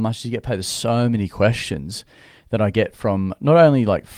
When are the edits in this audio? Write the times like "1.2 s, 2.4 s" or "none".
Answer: none